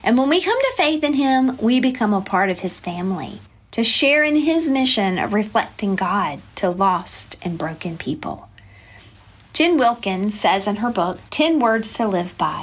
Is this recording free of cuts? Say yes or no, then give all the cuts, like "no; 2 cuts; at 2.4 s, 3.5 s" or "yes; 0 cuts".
yes; 0 cuts